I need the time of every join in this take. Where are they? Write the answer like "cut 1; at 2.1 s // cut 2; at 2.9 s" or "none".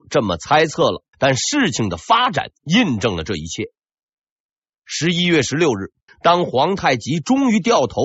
cut 1; at 1.1 s // cut 2; at 6.1 s